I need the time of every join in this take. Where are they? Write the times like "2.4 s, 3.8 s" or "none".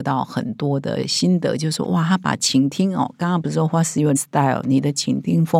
4.2 s